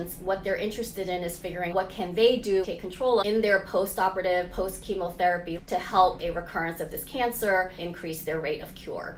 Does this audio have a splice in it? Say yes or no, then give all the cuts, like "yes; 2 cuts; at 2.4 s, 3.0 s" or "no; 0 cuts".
yes; 6 cuts; at 1.7 s, 2.6 s, 3.2 s, 5.6 s, 6.2 s, 7.8 s